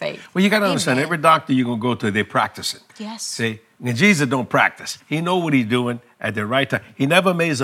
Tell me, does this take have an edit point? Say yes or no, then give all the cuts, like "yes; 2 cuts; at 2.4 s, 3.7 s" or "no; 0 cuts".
yes; 2 cuts; at 2.9 s, 5.0 s